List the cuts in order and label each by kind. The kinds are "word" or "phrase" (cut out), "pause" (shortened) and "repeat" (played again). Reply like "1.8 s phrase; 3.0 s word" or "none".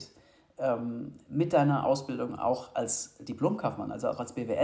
none